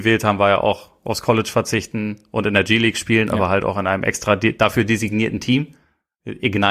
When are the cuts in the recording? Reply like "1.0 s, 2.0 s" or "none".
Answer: none